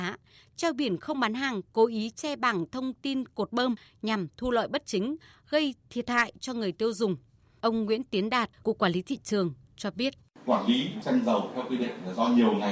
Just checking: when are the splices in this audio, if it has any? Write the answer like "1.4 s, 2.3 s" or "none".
8.6 s